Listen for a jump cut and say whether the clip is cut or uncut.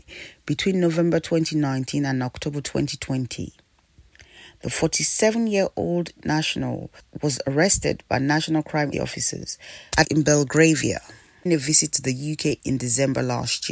cut